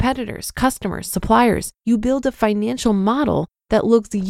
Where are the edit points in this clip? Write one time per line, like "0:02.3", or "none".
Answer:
0:01.8